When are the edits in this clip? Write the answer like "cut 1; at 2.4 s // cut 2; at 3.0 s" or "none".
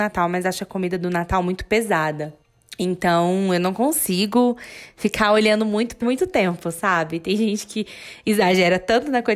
cut 1; at 6.0 s